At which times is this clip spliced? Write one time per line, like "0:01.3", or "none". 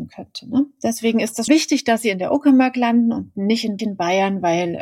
0:01.5
0:03.8